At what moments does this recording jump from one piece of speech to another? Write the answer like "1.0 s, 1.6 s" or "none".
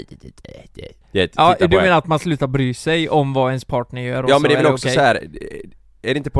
1.0 s